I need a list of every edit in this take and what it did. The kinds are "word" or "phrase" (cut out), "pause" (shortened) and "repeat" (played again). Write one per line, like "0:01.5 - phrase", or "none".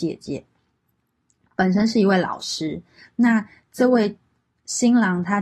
none

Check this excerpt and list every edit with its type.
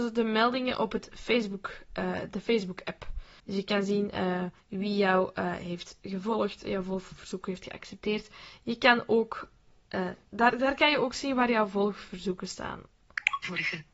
0:03.4 - pause
0:04.6 - pause
0:10.2 - pause

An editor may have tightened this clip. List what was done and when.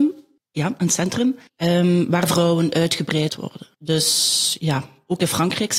0:01.5 - pause
0:03.3 - word

